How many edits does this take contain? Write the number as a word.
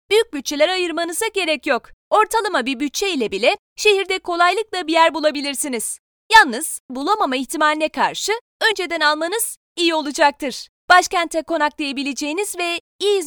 two